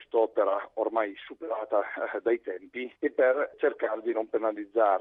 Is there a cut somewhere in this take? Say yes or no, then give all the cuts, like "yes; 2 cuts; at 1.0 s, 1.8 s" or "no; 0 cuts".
no; 0 cuts